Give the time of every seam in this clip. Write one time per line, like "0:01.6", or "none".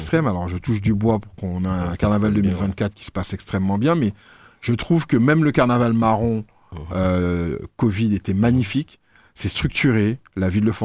none